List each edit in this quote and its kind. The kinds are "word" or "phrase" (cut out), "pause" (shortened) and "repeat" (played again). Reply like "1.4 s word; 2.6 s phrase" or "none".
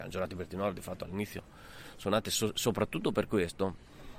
none